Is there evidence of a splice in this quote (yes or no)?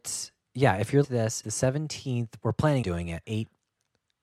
yes